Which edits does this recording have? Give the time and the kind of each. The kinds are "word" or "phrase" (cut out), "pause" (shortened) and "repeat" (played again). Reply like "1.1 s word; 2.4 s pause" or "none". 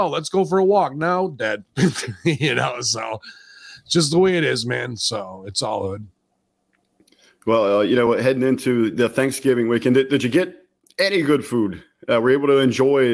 none